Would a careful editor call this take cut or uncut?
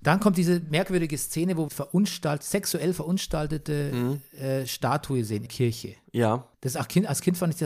cut